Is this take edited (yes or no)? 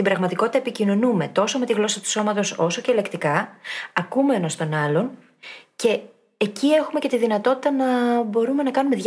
no